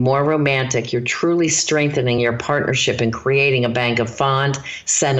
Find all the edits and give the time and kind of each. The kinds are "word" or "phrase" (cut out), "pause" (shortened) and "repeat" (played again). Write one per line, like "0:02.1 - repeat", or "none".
none